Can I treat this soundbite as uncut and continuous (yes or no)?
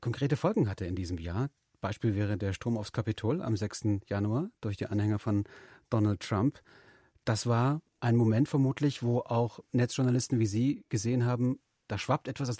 yes